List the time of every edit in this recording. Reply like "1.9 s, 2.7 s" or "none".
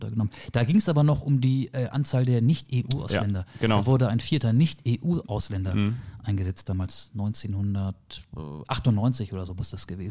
none